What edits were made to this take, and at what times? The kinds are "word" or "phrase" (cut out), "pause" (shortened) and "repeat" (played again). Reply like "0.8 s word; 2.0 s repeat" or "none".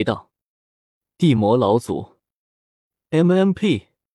none